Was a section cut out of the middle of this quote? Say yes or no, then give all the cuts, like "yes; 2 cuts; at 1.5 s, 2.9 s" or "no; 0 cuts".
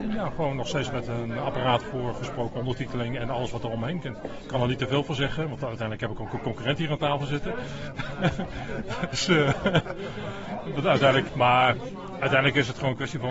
yes; 1 cut; at 11.3 s